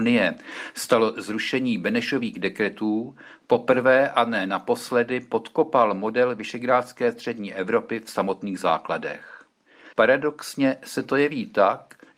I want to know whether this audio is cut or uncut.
cut